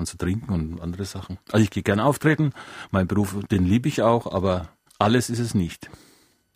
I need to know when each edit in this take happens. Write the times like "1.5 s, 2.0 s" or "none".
1.4 s, 4.9 s